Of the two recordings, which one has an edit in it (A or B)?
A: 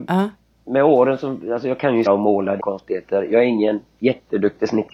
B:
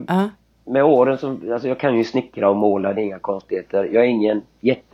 A